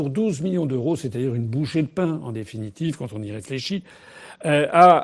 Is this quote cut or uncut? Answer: uncut